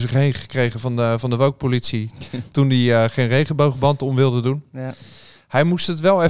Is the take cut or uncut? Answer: uncut